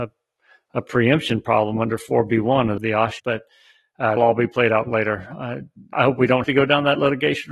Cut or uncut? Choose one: cut